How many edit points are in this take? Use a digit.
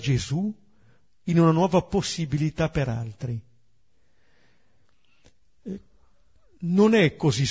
0